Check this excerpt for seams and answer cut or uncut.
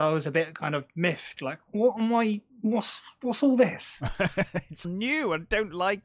cut